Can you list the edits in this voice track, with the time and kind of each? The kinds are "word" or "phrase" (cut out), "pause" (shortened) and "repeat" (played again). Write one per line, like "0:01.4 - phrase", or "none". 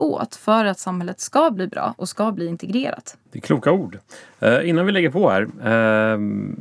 0:03.3 - pause